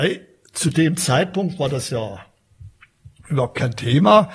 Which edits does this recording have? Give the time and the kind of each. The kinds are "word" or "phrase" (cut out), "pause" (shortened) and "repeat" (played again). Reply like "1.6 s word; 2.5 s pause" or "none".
none